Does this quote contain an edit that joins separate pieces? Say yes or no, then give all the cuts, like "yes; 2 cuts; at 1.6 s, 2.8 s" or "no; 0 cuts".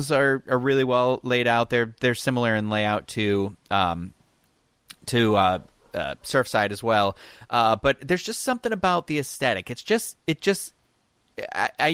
no; 0 cuts